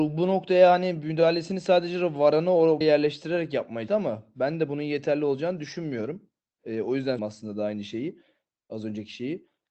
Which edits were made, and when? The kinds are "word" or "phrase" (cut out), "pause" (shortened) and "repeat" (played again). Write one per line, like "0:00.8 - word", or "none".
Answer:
0:02.8 - word
0:03.9 - word
0:07.2 - word